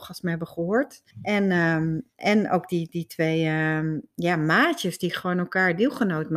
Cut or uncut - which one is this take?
cut